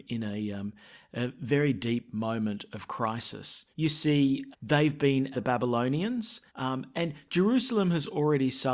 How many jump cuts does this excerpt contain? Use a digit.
4